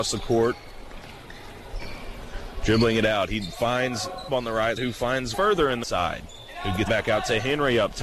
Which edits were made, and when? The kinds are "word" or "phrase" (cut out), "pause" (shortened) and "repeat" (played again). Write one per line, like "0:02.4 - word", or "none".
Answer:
0:04.3 - word
0:04.8 - word
0:05.3 - word
0:05.8 - word
0:06.9 - word